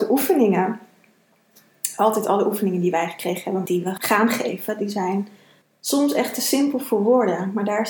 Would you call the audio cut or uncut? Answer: cut